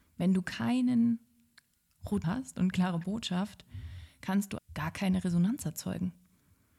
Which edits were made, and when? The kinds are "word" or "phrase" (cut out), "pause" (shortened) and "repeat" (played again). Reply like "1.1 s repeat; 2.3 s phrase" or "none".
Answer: 2.2 s word; 2.7 s word; 4.6 s word